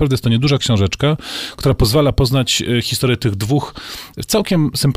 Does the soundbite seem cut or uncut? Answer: uncut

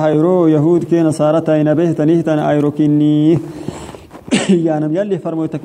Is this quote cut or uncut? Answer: uncut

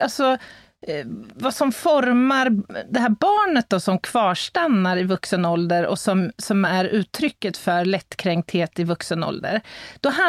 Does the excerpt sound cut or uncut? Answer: uncut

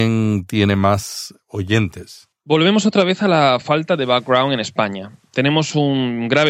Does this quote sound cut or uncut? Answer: uncut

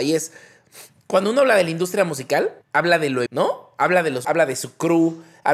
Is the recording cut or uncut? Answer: cut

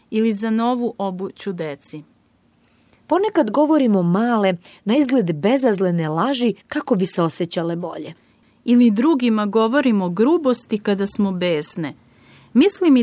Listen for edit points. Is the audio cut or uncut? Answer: cut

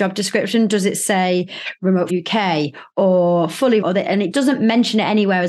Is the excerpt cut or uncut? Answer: cut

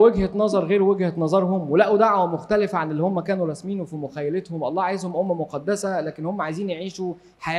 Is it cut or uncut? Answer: uncut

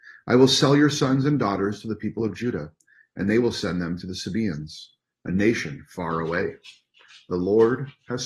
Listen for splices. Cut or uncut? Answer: uncut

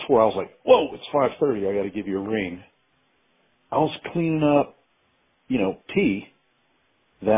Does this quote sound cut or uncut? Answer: uncut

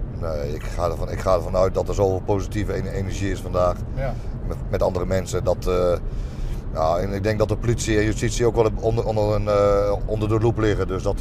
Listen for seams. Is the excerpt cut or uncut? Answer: uncut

